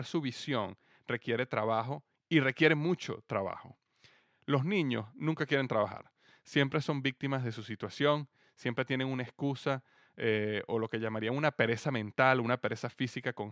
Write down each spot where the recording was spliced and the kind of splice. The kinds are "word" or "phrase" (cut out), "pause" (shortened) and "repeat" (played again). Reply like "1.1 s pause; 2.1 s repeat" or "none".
none